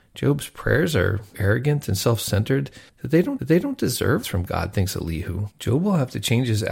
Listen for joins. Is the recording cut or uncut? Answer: cut